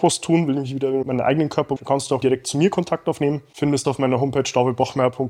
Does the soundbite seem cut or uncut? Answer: cut